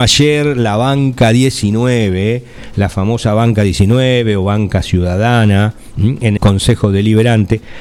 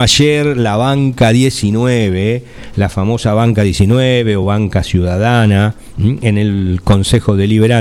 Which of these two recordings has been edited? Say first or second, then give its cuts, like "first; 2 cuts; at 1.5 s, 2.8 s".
first; 1 cut; at 6.4 s